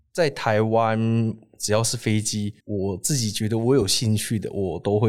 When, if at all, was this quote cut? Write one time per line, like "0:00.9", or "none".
0:02.6